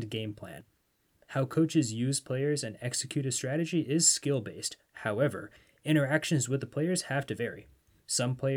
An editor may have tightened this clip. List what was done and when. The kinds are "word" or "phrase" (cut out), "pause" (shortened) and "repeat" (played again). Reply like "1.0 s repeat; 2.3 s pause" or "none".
none